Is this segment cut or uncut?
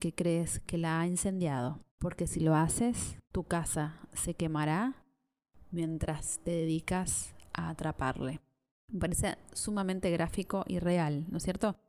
cut